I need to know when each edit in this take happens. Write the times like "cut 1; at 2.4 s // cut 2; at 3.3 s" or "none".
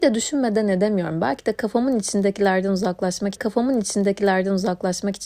cut 1; at 3.4 s